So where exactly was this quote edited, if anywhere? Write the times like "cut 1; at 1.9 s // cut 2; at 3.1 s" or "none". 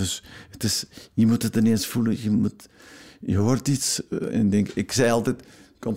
cut 1; at 4.3 s